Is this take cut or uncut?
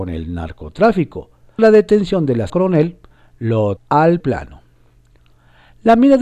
cut